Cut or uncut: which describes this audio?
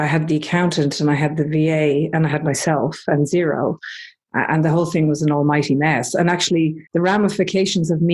cut